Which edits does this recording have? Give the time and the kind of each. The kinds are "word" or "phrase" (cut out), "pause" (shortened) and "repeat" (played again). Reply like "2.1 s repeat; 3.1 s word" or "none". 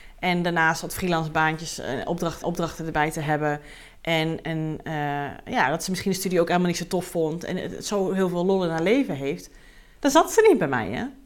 2.4 s repeat; 4.4 s word

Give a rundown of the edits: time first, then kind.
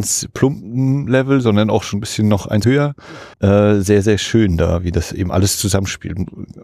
1.9 s word; 2.6 s phrase; 3.3 s pause

